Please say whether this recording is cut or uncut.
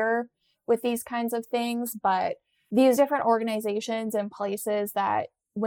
uncut